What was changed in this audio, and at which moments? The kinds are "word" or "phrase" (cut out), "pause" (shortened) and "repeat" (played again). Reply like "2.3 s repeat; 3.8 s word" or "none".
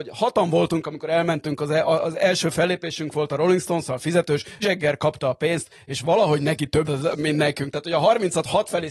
4.6 s word; 6.8 s phrase